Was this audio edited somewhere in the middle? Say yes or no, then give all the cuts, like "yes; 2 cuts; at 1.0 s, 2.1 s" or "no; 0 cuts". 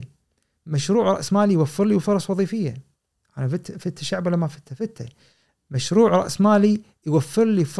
no; 0 cuts